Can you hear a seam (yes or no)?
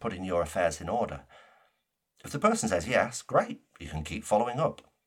no